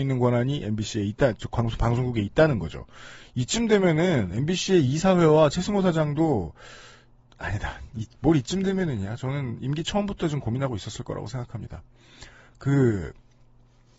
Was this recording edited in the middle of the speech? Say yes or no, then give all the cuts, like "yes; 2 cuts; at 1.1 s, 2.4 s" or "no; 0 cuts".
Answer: no; 0 cuts